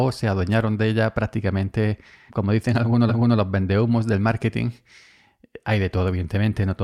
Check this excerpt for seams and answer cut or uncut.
cut